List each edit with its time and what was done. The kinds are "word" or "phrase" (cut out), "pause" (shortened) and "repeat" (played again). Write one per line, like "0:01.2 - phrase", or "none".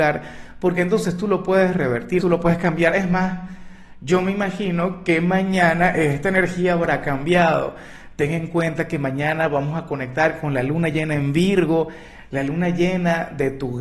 0:02.2 - word